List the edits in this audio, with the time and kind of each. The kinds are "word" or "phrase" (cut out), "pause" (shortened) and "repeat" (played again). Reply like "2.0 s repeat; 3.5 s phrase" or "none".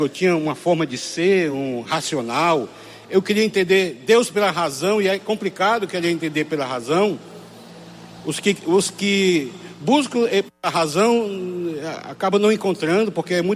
none